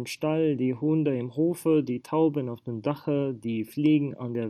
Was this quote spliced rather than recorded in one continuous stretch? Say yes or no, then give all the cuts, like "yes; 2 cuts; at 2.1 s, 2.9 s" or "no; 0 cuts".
no; 0 cuts